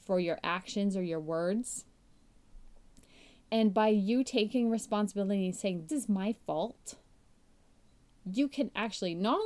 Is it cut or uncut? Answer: cut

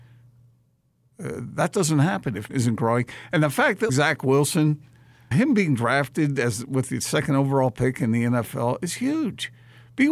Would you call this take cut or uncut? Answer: cut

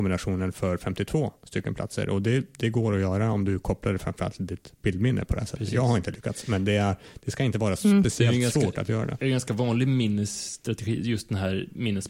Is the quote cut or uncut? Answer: uncut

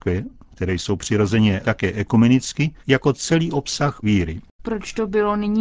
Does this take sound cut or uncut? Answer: cut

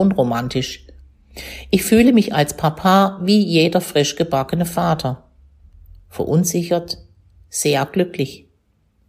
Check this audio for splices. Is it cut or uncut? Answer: uncut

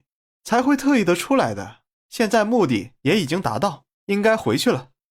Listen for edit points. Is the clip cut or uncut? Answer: cut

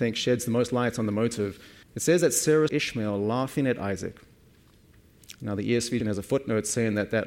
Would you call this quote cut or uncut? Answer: cut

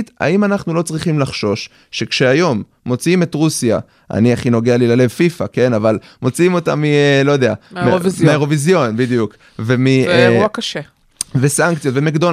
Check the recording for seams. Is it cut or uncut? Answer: uncut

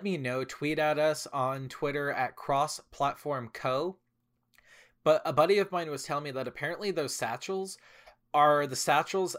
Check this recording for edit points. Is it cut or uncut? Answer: uncut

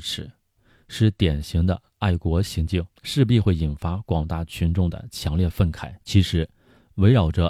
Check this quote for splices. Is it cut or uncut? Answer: cut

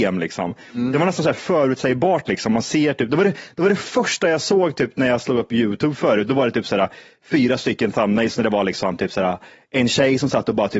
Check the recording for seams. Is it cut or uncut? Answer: uncut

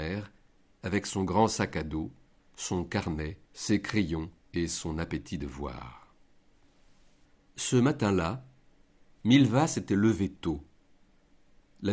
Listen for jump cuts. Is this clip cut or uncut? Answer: cut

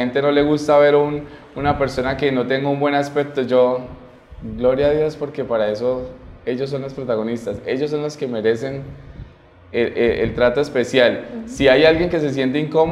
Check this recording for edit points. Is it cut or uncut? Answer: uncut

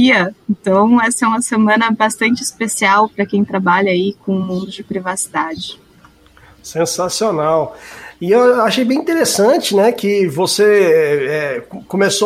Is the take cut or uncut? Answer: uncut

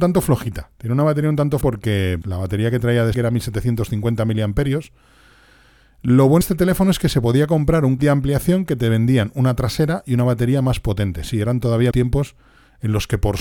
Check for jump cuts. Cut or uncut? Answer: cut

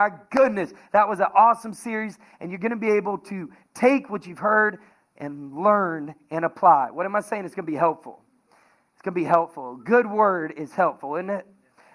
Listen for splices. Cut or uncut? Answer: uncut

